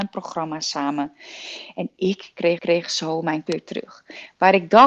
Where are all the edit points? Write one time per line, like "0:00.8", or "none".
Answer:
0:02.6
0:03.5